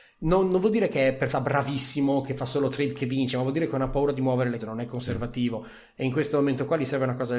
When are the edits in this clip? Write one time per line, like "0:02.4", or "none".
0:01.3
0:04.6